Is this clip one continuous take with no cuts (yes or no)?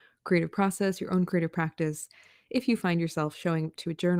yes